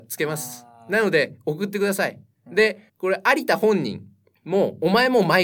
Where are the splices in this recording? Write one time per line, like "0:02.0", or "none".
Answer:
0:02.9
0:04.3